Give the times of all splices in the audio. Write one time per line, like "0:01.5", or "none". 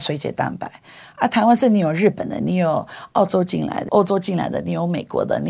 0:03.9